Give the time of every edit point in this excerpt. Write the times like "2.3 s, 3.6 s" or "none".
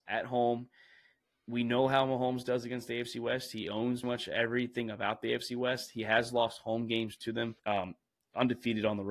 4.0 s, 7.6 s